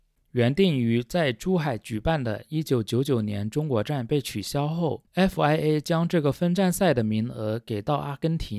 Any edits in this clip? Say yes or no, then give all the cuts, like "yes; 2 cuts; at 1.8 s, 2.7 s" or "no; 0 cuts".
no; 0 cuts